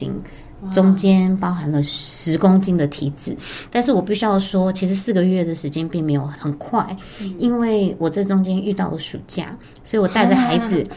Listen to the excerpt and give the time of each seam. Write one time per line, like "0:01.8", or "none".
none